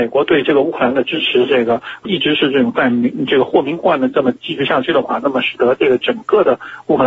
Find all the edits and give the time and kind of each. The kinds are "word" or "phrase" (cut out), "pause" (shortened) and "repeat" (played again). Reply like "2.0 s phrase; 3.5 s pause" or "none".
2.0 s word